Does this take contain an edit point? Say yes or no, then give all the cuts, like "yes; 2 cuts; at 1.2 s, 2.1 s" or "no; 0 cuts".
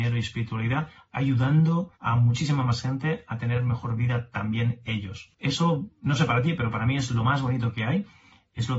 yes; 2 cuts; at 2.0 s, 5.3 s